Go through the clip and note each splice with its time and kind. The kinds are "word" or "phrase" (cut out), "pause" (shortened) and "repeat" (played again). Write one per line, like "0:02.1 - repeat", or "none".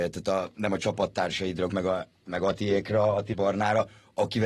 0:01.7 - word
0:03.3 - word